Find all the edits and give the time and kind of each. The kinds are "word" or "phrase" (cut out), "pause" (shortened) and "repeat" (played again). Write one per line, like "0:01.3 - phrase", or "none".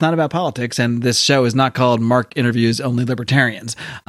none